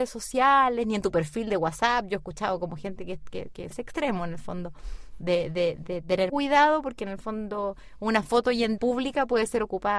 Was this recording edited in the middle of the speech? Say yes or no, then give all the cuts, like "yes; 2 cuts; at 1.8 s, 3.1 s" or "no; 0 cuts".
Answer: yes; 3 cuts; at 3.7 s, 6.3 s, 8.8 s